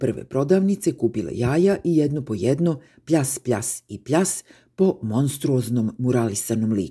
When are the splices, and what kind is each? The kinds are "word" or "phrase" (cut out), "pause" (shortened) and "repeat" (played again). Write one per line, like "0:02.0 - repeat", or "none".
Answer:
none